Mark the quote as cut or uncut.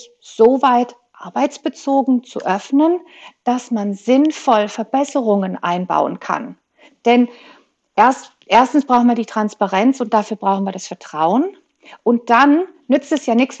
uncut